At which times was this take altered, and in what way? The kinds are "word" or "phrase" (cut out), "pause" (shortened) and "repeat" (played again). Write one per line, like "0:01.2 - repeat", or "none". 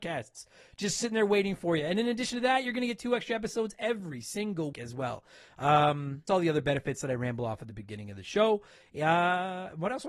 0:04.7 - word
0:06.3 - word